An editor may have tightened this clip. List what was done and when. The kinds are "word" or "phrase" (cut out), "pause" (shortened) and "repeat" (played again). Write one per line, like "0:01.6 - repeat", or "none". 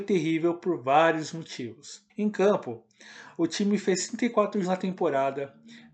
0:02.1 - pause
0:04.6 - word